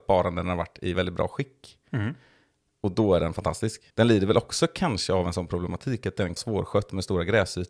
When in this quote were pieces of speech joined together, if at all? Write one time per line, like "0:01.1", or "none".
0:00.9
0:03.9
0:06.4